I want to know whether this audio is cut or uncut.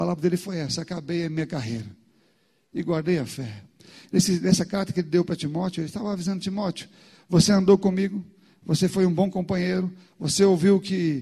uncut